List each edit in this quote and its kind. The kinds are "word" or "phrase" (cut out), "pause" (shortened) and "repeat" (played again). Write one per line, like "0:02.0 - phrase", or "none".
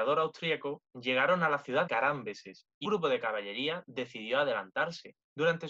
0:01.9 - word
0:02.8 - word

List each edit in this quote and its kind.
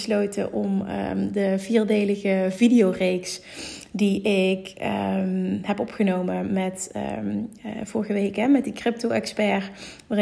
none

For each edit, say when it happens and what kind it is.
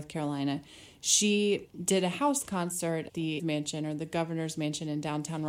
0:03.1 - word
0:03.4 - word

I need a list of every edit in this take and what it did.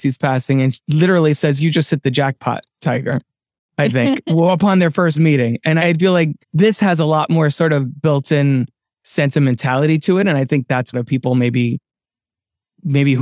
0:05.8 - word
0:06.4 - pause
0:10.9 - phrase

